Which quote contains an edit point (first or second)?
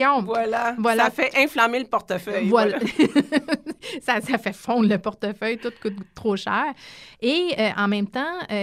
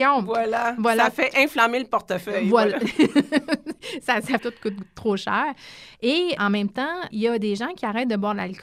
second